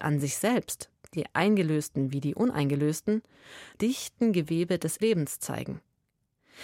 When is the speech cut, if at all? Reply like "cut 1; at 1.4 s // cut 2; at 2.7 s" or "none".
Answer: cut 1; at 3.8 s // cut 2; at 5.0 s